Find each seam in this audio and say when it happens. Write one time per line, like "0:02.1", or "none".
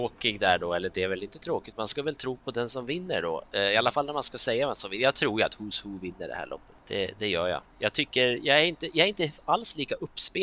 0:06.8